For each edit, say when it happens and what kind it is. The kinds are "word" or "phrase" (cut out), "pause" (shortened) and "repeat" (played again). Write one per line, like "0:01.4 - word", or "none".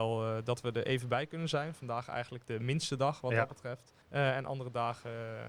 0:04.0 - pause